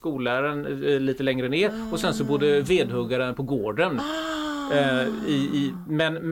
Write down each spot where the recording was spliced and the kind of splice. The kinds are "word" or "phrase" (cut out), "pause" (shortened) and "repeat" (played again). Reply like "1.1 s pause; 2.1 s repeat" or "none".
none